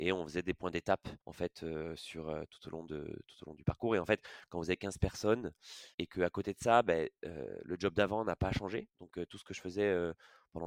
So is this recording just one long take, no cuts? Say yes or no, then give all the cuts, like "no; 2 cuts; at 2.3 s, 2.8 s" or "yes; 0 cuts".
no; 3 cuts; at 1.2 s, 5.9 s, 8.9 s